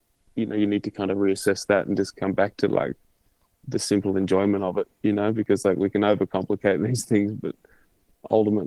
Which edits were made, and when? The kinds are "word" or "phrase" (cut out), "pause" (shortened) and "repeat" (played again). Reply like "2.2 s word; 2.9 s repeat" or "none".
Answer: none